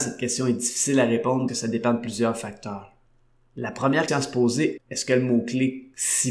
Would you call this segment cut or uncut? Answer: cut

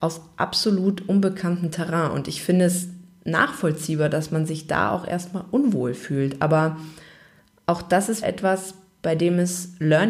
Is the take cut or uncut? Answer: cut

